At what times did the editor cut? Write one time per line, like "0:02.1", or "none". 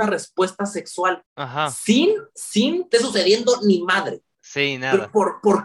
0:01.3
0:02.9